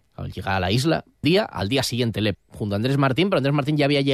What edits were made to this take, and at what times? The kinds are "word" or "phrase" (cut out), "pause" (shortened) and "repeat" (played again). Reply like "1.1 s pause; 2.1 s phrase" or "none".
1.2 s word; 2.3 s word